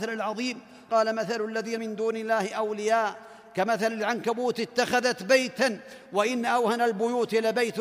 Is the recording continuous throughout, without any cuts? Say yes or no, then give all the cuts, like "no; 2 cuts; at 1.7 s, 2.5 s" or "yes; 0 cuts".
no; 1 cut; at 1.8 s